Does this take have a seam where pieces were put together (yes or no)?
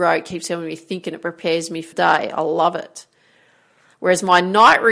yes